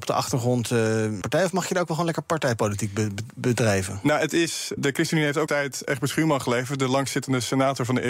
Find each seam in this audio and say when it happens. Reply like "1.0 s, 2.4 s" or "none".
1.2 s, 4.8 s, 5.5 s